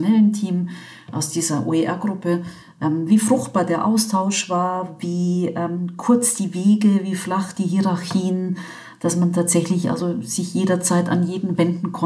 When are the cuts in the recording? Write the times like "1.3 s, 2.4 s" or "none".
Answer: none